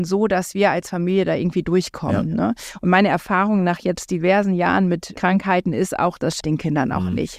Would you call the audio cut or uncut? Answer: cut